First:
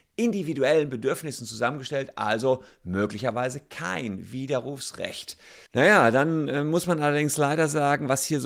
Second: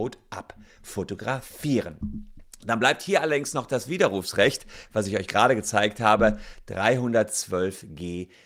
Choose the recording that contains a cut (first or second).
first